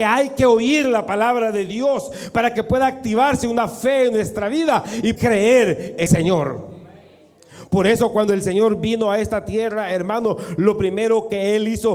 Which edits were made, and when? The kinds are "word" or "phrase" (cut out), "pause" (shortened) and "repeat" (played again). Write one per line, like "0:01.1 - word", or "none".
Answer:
0:05.2 - word
0:06.1 - word